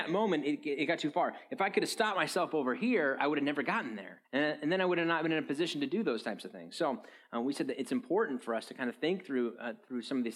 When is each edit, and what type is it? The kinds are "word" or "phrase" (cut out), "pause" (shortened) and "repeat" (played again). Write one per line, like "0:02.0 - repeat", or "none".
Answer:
0:04.2 - pause

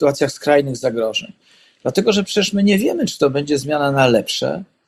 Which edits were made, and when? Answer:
none

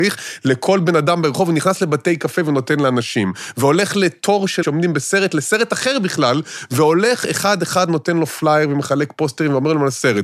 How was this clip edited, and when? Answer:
0:04.6 - word

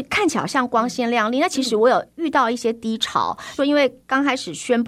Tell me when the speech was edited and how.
0:03.6 - phrase

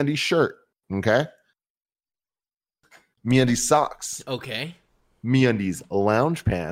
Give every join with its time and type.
none

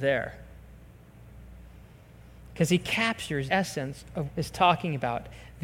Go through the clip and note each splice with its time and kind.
0:03.5 - word
0:04.3 - phrase

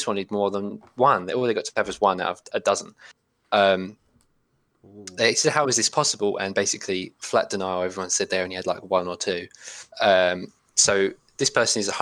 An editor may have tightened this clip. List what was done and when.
0:09.9 - pause

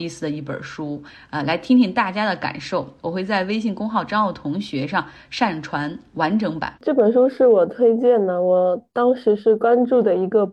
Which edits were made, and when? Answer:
0:06.8 - pause

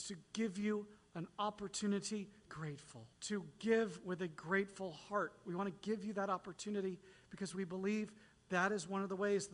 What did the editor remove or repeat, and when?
0:02.5 - phrase
0:03.1 - pause

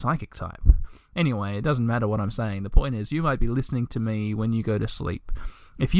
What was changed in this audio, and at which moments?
none

